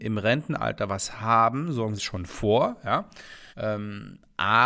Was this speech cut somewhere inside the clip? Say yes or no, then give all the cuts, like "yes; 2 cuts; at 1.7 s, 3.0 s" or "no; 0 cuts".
yes; 2 cuts; at 2.0 s, 3.5 s